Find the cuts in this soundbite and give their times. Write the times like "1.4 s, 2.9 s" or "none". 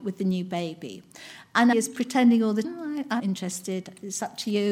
1.7 s, 2.6 s, 3.2 s